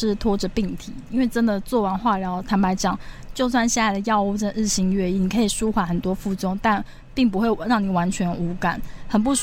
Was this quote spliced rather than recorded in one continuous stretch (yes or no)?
no